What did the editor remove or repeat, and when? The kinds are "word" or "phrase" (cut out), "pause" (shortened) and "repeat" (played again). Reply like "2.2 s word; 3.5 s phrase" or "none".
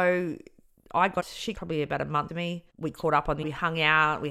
1.2 s word; 1.5 s phrase; 2.3 s word; 2.7 s pause; 3.4 s word